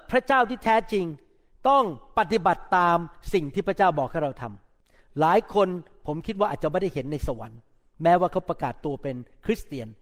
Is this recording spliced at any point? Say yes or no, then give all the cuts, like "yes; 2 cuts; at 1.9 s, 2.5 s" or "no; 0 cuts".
no; 0 cuts